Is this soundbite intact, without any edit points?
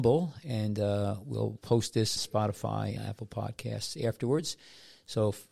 no; 3 cuts; at 1.6 s, 2.2 s, 3.0 s

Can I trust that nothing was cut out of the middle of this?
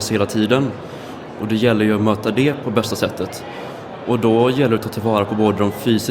no; 1 cut; at 2.6 s

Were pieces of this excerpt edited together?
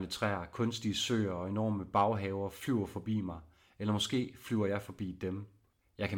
no; 0 cuts

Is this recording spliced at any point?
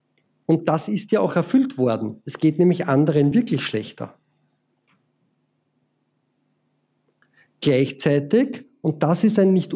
no; 0 cuts

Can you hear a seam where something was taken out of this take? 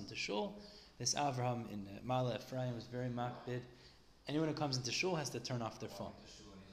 no; 0 cuts

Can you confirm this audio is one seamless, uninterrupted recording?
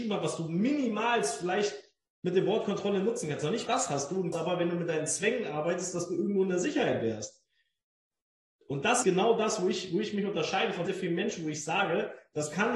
no; 4 cuts; at 3.7 s, 4.3 s, 9.0 s, 10.9 s

